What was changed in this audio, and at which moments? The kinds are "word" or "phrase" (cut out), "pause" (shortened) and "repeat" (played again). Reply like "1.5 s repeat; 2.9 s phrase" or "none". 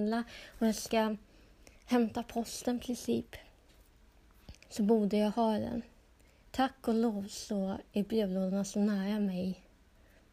1.7 s pause